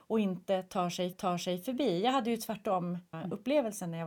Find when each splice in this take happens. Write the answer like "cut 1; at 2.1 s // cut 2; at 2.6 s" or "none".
cut 1; at 1.1 s // cut 2; at 3.1 s